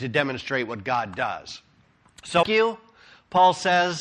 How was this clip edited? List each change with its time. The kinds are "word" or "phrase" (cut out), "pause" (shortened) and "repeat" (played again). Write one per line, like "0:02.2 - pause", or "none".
0:02.4 - phrase

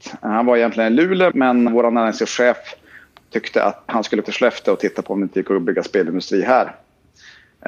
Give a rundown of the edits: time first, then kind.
0:01.3 - word
0:01.7 - word
0:03.9 - word
0:04.2 - word

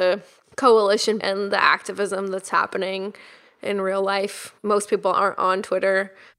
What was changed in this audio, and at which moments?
0:01.2 - word
0:04.6 - pause

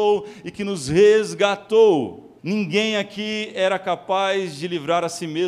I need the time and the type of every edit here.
0:02.4 - pause

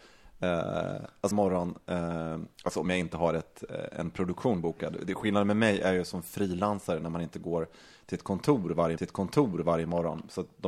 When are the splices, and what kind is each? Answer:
0:01.3 - phrase
0:09.0 - repeat

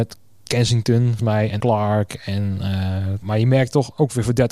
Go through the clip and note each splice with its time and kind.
0:01.2 - word
0:01.6 - word
0:03.2 - word

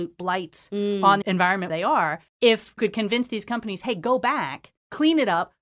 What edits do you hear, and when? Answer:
0:01.2 - word
0:01.7 - word
0:02.8 - word

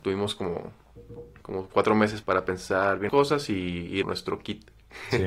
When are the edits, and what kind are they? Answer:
0:01.4 - word
0:02.2 - word
0:03.1 - word
0:04.0 - phrase

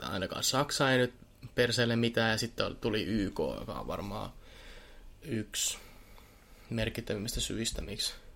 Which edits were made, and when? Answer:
none

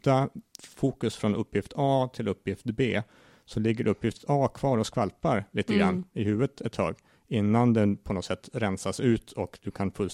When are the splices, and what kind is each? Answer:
none

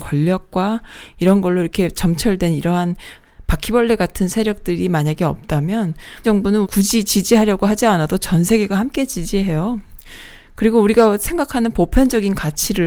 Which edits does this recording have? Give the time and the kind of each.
0:06.2 - word
0:06.6 - word

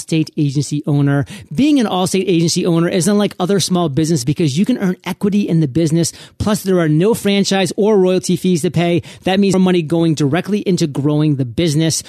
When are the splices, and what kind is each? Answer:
0:04.2 - word
0:09.5 - word

